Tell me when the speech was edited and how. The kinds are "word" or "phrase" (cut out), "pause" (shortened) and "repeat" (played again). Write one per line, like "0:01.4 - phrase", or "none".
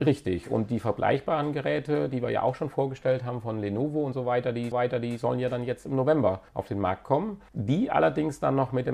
0:04.7 - repeat
0:06.5 - pause
0:07.5 - pause